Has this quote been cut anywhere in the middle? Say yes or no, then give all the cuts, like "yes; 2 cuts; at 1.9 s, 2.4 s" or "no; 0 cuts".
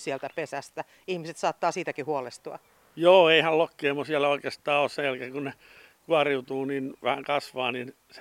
no; 0 cuts